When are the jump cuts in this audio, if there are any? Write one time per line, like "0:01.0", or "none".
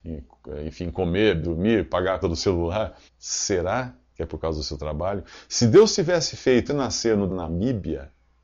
0:01.4
0:02.2
0:03.1
0:06.7
0:07.3